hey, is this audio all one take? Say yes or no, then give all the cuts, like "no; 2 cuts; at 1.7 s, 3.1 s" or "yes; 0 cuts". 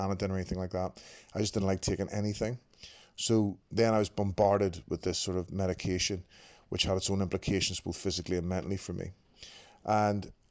yes; 0 cuts